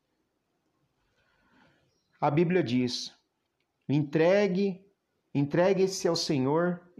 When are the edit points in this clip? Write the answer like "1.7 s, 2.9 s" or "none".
none